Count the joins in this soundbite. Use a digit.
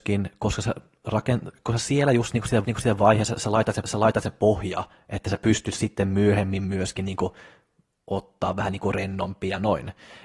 2